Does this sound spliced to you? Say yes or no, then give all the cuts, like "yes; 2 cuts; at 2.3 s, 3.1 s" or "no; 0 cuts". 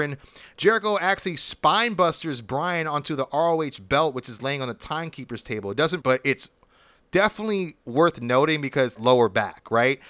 yes; 2 cuts; at 6.0 s, 9.0 s